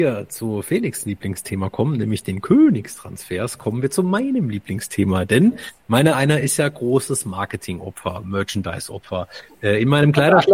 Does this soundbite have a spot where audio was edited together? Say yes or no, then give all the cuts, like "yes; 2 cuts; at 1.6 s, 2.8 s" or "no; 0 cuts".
no; 0 cuts